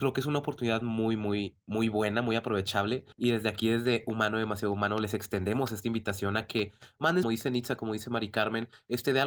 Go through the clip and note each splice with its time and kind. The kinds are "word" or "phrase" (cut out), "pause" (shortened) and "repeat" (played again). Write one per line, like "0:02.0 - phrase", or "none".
0:03.1 - pause
0:07.2 - phrase